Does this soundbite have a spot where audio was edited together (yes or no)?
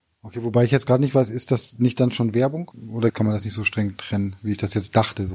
no